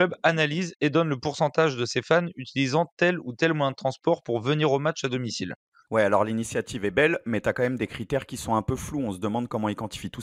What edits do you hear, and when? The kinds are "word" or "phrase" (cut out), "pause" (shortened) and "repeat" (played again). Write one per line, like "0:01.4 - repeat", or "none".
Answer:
none